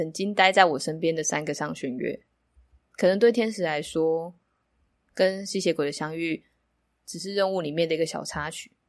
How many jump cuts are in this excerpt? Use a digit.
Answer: 0